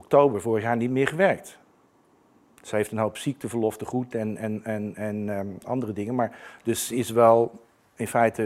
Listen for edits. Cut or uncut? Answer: uncut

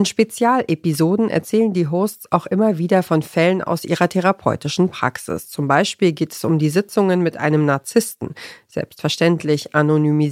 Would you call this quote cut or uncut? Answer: uncut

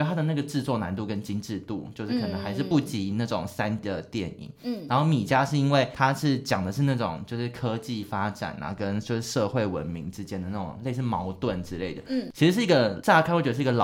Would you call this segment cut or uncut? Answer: cut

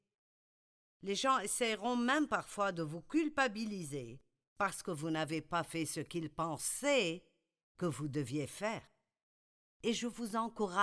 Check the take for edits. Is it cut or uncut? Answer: uncut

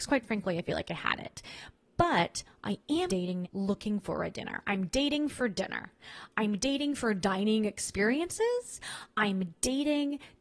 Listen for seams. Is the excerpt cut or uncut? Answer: cut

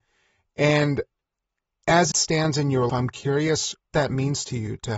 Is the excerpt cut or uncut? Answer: cut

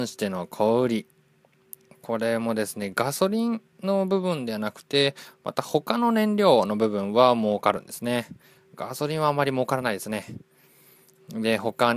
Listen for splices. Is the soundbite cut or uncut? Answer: cut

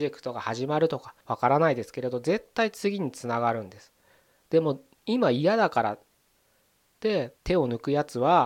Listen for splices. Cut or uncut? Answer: cut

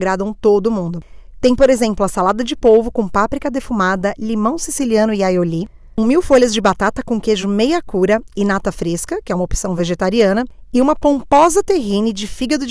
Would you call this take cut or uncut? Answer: uncut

